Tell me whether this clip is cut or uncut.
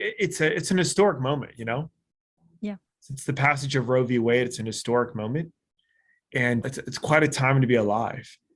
cut